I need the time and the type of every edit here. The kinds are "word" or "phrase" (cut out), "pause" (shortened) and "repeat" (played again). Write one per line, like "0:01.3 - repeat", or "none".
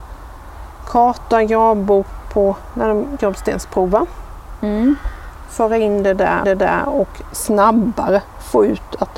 0:06.4 - repeat